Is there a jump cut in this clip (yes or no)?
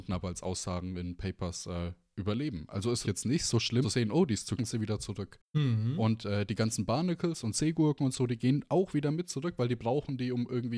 yes